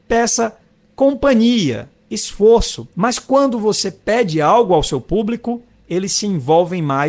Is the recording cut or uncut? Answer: cut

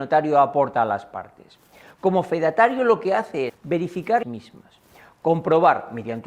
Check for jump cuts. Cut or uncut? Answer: cut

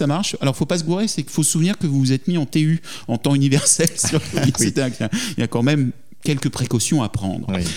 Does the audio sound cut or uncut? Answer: uncut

